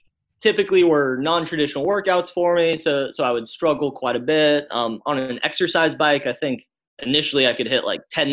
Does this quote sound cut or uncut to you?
uncut